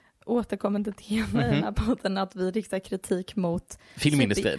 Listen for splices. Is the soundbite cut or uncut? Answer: uncut